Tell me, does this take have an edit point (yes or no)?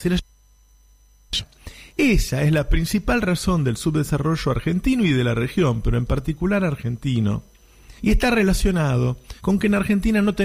yes